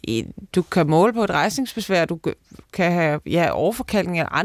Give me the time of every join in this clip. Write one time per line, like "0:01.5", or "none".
none